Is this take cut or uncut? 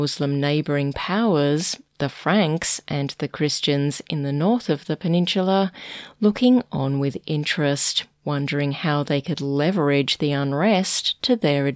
uncut